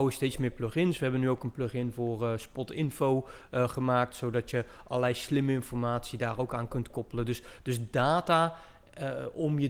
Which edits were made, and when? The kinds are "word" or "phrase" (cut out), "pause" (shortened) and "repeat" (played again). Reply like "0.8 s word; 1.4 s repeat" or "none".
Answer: none

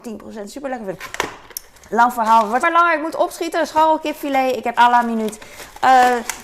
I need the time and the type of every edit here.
2.6 s word; 4.7 s word

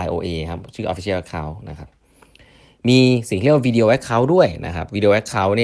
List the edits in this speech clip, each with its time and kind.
none

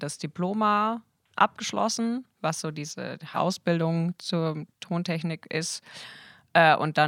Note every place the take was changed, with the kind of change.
2.3 s pause; 3.3 s word; 4.7 s pause

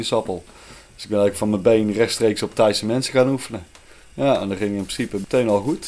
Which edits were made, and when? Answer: none

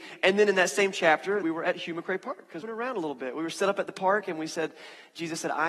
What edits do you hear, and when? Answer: 1.4 s phrase; 2.6 s phrase

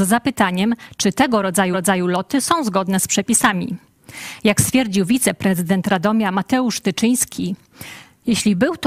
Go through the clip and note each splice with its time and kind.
1.7 s repeat

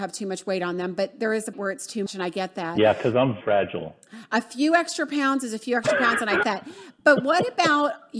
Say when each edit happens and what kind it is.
1.5 s word; 2.1 s word; 3.4 s word; 6.4 s word

